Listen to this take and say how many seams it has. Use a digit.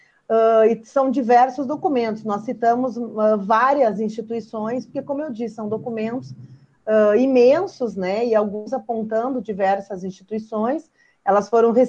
0